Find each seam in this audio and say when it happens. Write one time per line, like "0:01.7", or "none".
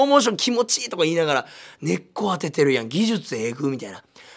none